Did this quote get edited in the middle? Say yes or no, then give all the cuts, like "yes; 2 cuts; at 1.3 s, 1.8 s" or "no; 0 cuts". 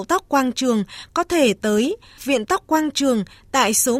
yes; 1 cut; at 2.2 s